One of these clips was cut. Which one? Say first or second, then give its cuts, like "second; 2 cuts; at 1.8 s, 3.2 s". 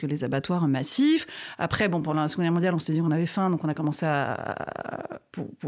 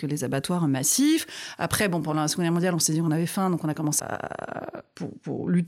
second; 1 cut; at 4.0 s